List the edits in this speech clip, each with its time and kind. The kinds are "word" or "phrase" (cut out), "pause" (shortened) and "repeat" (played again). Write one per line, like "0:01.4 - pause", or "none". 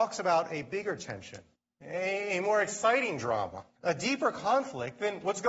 0:01.6 - pause
0:03.8 - pause

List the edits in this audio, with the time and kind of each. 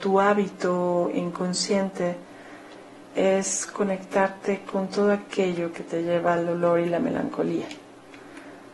none

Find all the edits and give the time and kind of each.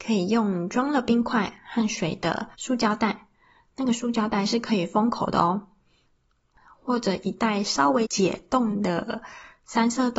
0:02.5 - pause

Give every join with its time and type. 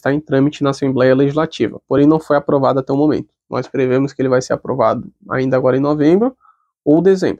none

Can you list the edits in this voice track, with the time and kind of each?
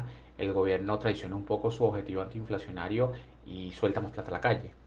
none

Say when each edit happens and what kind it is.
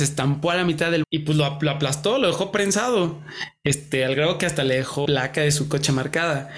0:01.0 - word
0:05.0 - word

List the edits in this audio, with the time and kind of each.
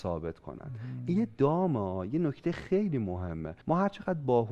0:03.6 - pause

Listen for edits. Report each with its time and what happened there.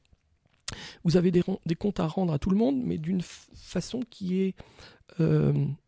none

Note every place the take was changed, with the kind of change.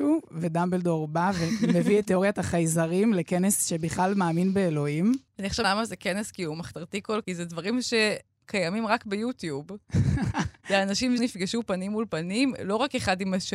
0:05.3 - pause
0:05.6 - word
0:07.2 - word
0:11.2 - phrase

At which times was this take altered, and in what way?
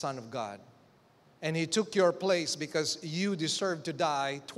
0:01.2 - pause

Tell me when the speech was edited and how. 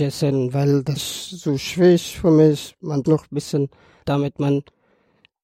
0:01.0 - word
0:03.0 - word
0:04.0 - phrase

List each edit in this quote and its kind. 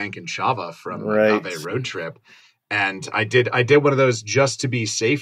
none

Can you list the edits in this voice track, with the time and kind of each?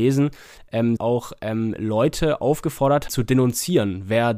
0:01.0 - phrase
0:03.1 - word

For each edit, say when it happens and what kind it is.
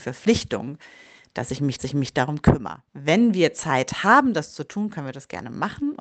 0:01.8 - repeat
0:02.9 - pause

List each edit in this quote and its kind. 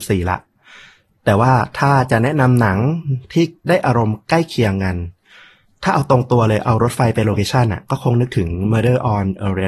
none

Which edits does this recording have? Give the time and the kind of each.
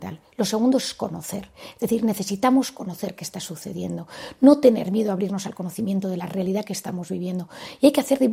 none

